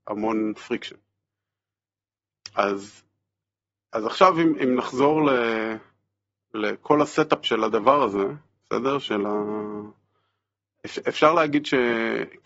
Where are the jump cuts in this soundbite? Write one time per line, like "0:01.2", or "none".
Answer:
none

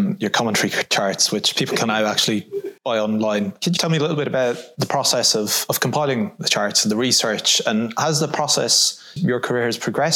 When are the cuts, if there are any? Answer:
0:02.8
0:03.8
0:09.2

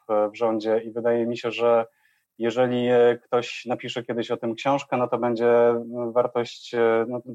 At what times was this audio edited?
none

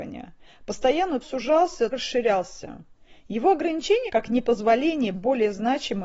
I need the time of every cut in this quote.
0:01.2
0:01.9
0:04.1
0:05.1

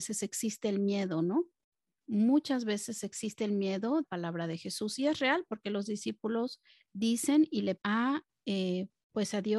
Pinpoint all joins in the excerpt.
0:04.0
0:06.7
0:07.8

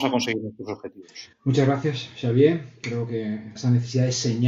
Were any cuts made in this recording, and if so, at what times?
0:01.3
0:03.6

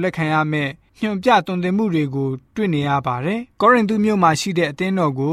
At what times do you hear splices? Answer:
0:03.5

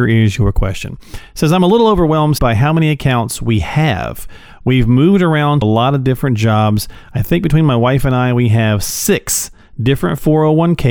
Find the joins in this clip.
0:02.4
0:05.6

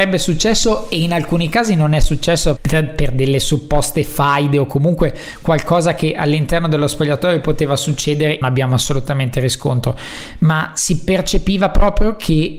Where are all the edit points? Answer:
0:02.6
0:08.4

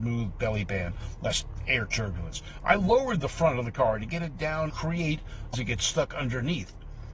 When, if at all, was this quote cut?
0:04.7
0:05.5

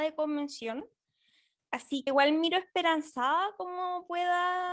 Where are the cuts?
0:02.1

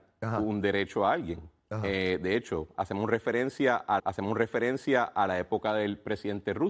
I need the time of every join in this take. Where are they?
0:04.0

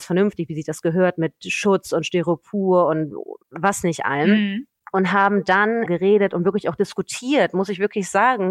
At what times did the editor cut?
0:05.9

